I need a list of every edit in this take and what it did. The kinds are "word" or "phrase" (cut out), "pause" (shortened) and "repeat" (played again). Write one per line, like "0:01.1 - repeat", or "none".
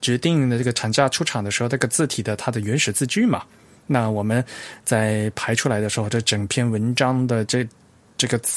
none